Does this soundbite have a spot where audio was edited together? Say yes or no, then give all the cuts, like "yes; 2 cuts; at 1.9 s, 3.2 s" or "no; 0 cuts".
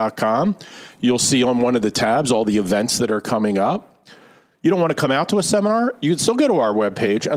no; 0 cuts